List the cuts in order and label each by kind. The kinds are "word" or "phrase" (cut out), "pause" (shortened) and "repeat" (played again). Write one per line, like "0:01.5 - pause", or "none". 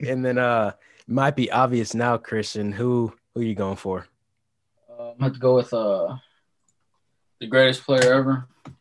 none